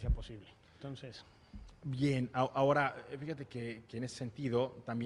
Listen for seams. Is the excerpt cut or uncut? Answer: uncut